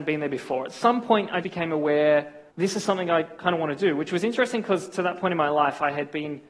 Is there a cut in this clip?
yes; 2 cuts; at 1.4 s, 2.5 s

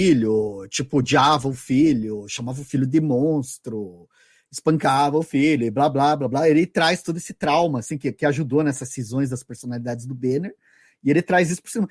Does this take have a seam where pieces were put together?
no; 0 cuts

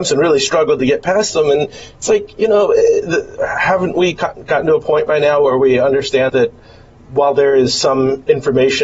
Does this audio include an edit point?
yes; 1 cut; at 6.3 s

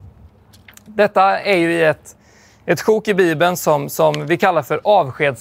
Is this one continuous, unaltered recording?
yes; 0 cuts

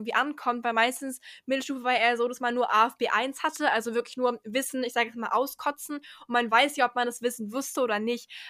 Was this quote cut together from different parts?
no; 0 cuts

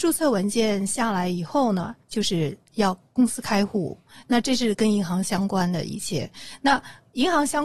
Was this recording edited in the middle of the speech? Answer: yes; 1 cut; at 2.0 s

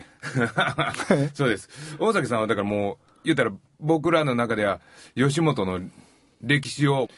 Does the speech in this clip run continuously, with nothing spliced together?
yes; 0 cuts

